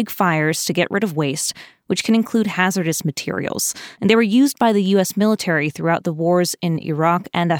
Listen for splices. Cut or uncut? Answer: cut